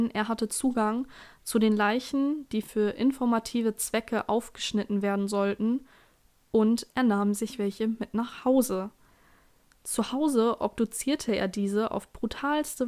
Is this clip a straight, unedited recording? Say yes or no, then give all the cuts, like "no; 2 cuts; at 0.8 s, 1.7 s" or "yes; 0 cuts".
yes; 0 cuts